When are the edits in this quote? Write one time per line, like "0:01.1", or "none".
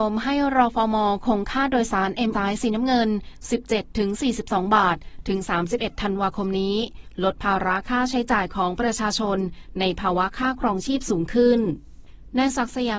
0:02.3